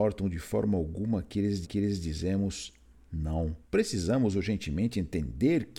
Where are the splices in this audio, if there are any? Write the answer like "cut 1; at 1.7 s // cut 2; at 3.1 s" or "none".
cut 1; at 1.6 s // cut 2; at 3.6 s

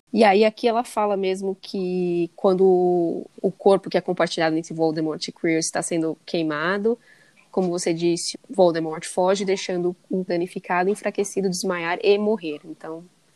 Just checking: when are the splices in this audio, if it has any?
cut 1; at 3.3 s // cut 2; at 8.3 s // cut 3; at 10.3 s

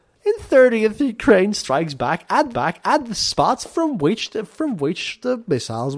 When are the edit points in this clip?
cut 1; at 2.5 s

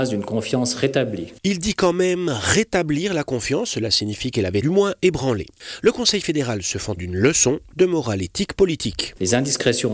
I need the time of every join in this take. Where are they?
cut 1; at 4.6 s // cut 2; at 7.0 s

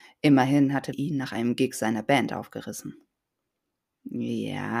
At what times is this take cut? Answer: cut 1; at 0.9 s

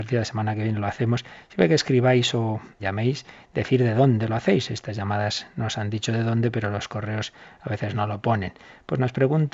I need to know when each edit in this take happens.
cut 1; at 2.8 s

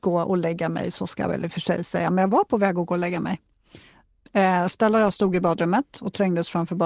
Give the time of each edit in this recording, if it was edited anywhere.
none

